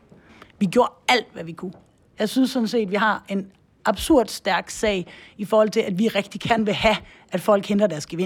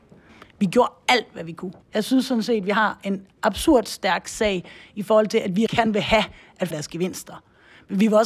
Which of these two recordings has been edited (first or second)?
second